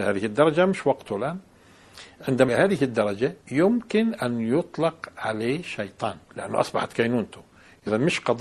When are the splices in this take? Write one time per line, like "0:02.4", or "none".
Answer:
0:02.5
0:03.4
0:06.2